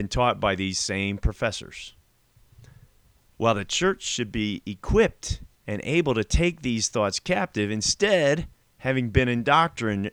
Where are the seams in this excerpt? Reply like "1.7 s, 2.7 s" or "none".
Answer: 5.5 s, 8.6 s